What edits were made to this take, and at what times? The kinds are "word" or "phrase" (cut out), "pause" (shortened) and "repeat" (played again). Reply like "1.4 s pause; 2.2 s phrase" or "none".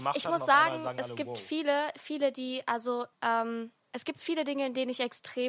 3.1 s pause